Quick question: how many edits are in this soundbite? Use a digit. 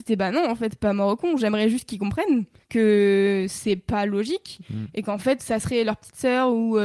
2